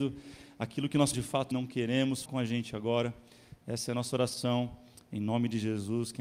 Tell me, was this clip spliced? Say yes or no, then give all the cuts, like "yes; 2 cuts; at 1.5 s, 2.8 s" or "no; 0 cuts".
yes; 3 cuts; at 1.1 s, 1.5 s, 2.3 s